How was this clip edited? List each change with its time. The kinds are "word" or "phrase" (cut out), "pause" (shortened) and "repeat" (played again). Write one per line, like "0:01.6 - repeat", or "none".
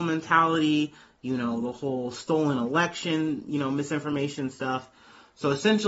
none